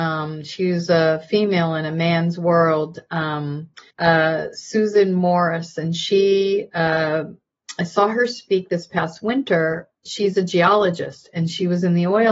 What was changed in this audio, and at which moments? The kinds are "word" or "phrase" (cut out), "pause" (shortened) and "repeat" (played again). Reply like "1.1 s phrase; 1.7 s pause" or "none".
3.9 s pause; 10.0 s pause